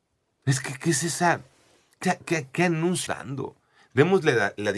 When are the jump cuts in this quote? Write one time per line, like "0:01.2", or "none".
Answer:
0:02.0
0:03.1